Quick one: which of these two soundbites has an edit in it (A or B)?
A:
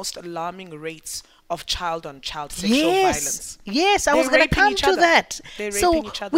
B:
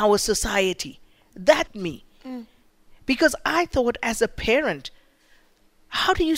B